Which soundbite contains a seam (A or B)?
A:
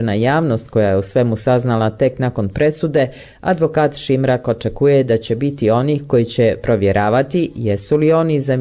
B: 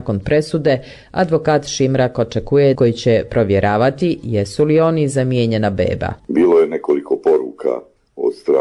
B